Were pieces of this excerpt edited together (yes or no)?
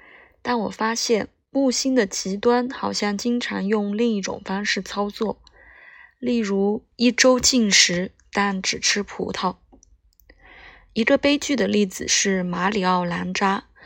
no